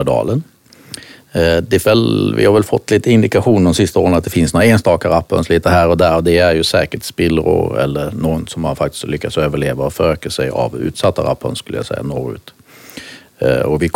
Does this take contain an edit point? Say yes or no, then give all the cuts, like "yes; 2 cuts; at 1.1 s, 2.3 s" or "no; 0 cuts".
yes; 1 cut; at 1.8 s